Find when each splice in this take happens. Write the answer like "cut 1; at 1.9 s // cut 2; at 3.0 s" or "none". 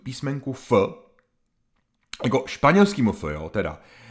none